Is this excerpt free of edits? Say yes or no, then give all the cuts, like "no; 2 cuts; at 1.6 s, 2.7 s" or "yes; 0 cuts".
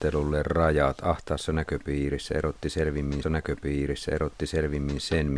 no; 1 cut; at 3.2 s